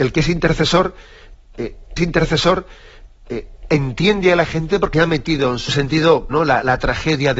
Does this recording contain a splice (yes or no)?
yes